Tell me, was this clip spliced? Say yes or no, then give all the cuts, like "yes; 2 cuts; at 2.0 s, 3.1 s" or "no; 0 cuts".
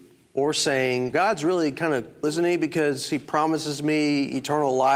yes; 2 cuts; at 1.1 s, 2.2 s